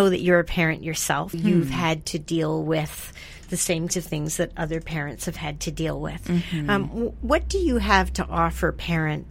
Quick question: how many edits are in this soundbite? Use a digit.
3